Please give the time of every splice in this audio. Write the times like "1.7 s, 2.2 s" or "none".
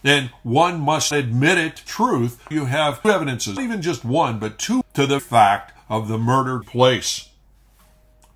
1.1 s, 1.9 s, 2.5 s, 3.0 s, 3.6 s, 4.8 s, 5.2 s, 6.6 s